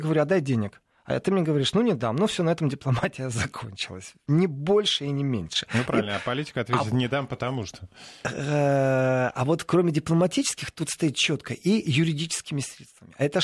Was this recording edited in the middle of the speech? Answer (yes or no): no